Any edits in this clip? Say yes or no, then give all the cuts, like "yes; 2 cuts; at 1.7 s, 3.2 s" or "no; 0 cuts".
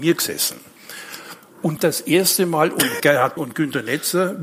yes; 3 cuts; at 1.8 s, 3.0 s, 3.4 s